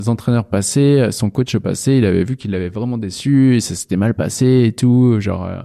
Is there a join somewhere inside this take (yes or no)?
no